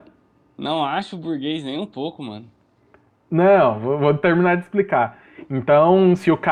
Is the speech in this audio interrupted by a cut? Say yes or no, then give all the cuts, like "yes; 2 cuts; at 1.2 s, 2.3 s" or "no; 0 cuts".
no; 0 cuts